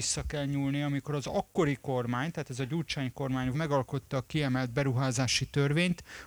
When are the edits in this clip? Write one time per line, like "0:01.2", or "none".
0:03.5